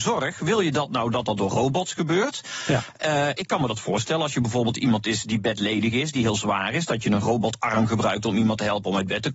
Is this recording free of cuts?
yes; 0 cuts

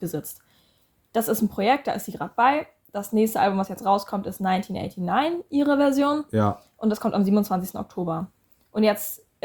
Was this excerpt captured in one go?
yes; 0 cuts

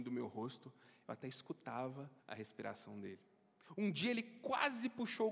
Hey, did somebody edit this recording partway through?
yes; 1 cut; at 2.2 s

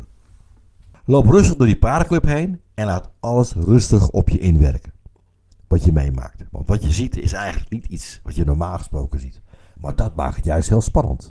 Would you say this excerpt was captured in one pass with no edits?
yes; 0 cuts

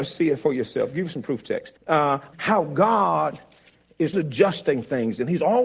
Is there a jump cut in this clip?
yes; 3 cuts; at 1.8 s, 2.3 s, 4.1 s

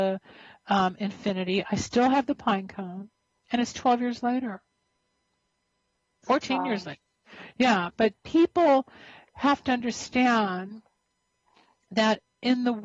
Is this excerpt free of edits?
yes; 0 cuts

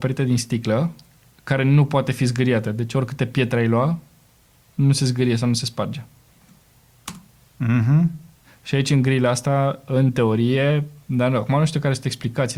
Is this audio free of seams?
yes; 0 cuts

